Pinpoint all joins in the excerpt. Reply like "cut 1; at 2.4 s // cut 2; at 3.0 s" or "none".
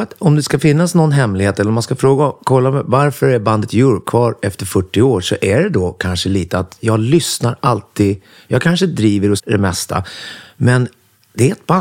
cut 1; at 9.4 s